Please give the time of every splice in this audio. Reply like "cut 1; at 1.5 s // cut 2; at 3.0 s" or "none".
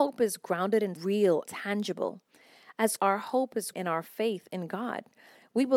cut 1; at 1.0 s // cut 2; at 1.5 s // cut 3; at 3.0 s // cut 4; at 3.7 s